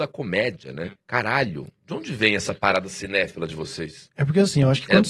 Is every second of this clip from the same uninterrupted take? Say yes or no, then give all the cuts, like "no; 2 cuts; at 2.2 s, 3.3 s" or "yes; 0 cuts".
no; 1 cut; at 0.9 s